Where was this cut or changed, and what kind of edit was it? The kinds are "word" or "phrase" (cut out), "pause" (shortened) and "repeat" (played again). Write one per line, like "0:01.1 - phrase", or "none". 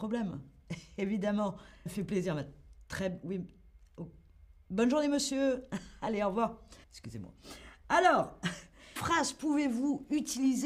0:01.9 - word
0:06.8 - pause
0:09.0 - word